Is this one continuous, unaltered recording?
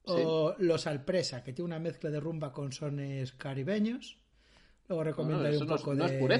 yes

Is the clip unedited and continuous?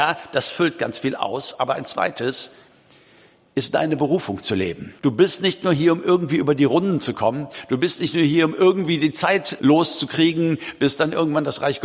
no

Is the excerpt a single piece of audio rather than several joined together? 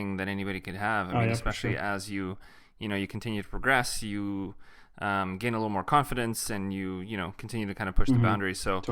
yes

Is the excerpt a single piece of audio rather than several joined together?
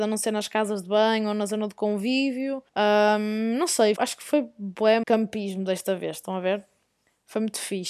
no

